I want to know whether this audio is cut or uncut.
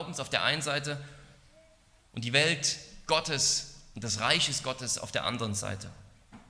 uncut